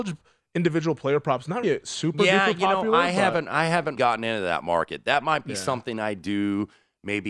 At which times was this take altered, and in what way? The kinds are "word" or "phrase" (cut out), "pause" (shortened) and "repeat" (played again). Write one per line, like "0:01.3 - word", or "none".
0:01.6 - word
0:04.0 - word